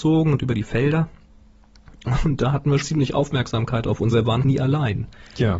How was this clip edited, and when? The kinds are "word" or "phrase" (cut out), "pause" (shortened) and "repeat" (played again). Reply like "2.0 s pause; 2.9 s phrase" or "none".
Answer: 2.8 s word; 4.1 s word; 4.4 s word